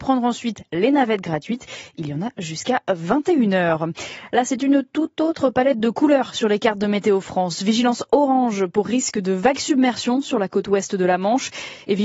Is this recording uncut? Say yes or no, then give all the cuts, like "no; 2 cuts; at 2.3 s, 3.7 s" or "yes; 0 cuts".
yes; 0 cuts